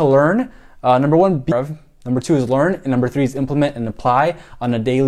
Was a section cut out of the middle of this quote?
yes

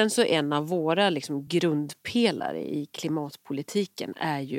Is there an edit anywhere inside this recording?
no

